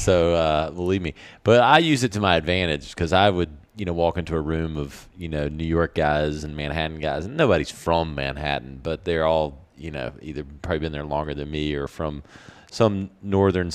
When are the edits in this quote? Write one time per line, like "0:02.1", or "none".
none